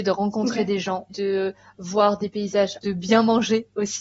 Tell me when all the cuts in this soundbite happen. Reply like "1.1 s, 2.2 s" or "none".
1.1 s, 2.8 s